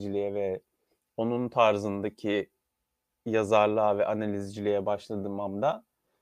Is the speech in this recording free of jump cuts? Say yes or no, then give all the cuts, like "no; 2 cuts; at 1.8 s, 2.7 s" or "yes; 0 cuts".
yes; 0 cuts